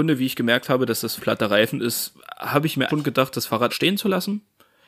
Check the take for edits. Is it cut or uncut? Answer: cut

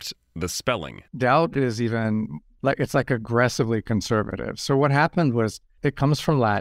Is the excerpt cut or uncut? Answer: uncut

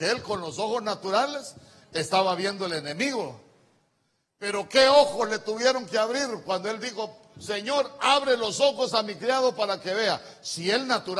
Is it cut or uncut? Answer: uncut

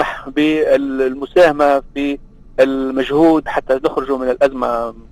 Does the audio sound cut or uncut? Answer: cut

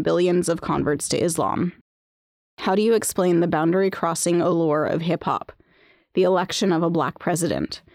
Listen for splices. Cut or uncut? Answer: uncut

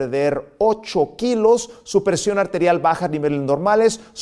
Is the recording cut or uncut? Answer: uncut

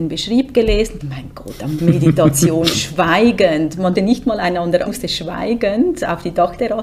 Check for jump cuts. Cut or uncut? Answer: cut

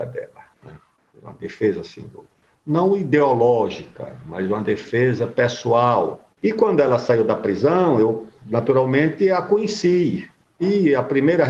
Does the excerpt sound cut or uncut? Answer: uncut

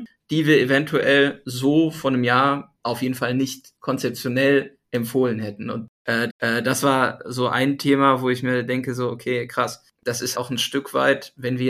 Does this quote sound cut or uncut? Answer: cut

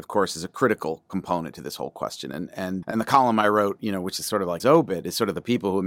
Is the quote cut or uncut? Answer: cut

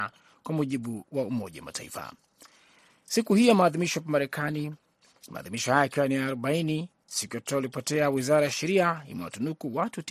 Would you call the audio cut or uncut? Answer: uncut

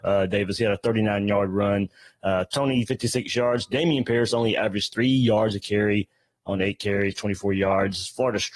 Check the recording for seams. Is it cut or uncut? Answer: cut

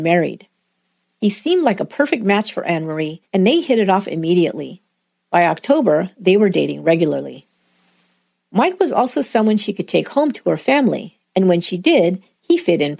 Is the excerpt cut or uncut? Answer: cut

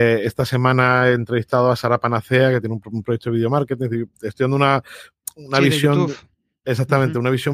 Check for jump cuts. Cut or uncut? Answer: uncut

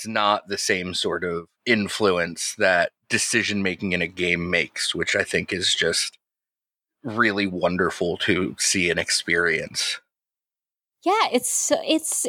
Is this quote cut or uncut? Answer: cut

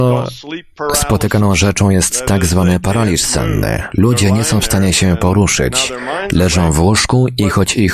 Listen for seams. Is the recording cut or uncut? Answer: uncut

